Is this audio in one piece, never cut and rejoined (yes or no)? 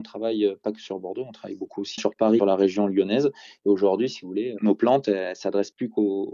no